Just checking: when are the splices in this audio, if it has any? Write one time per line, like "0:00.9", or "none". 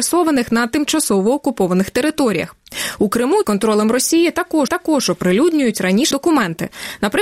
0:03.4
0:04.7
0:06.1

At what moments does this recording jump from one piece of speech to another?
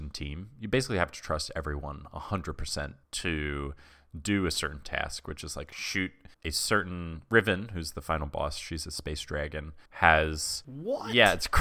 0:03.0
0:06.3
0:09.9

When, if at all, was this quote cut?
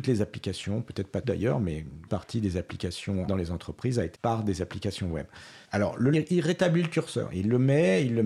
0:01.2
0:02.1
0:03.3
0:04.1
0:05.6
0:06.1

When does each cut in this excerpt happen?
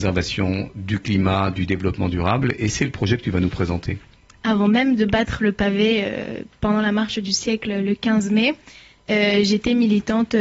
none

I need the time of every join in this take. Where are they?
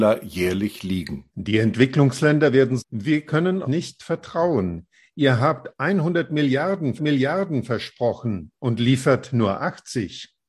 0:01.3
0:02.8
0:03.6
0:07.0

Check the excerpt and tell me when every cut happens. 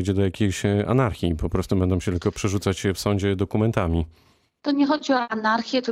none

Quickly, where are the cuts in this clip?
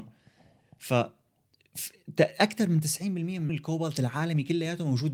0:03.5

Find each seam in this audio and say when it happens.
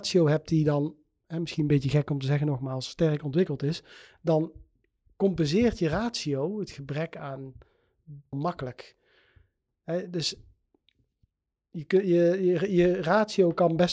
0:08.3

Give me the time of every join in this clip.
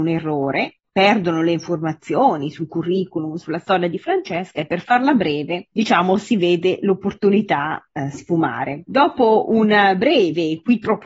none

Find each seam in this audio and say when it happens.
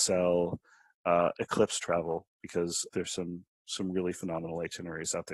0:02.9

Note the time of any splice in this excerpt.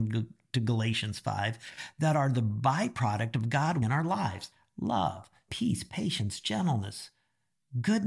0:03.8
0:05.5

